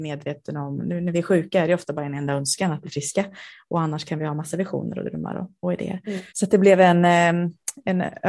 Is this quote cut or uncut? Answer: cut